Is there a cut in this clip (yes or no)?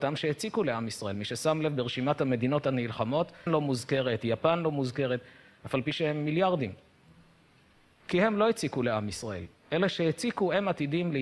yes